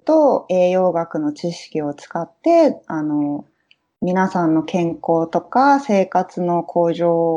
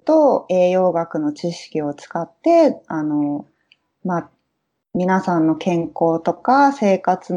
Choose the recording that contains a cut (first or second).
first